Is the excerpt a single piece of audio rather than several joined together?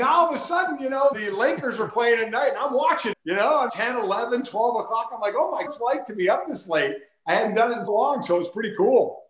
no; 5 cuts; at 1.1 s, 3.1 s, 3.7 s, 5.7 s, 7.9 s

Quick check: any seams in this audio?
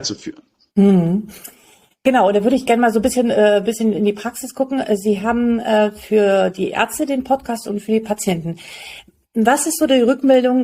no; 0 cuts

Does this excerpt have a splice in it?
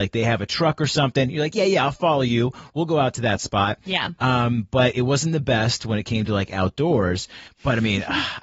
no; 0 cuts

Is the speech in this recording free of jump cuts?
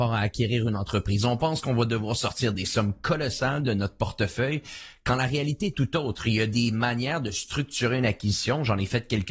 yes; 0 cuts

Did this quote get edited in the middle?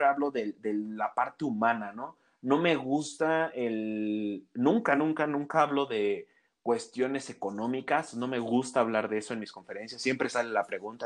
no; 0 cuts

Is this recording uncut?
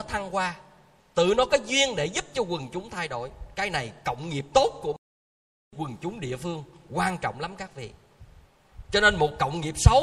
yes; 0 cuts

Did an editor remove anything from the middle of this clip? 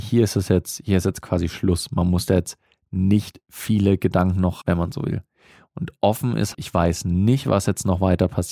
yes; 2 cuts; at 4.6 s, 6.5 s

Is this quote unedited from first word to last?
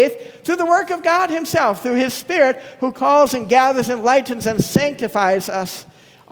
yes; 0 cuts

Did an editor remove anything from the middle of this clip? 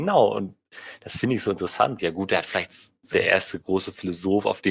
yes; 2 cuts; at 2.0 s, 3.1 s

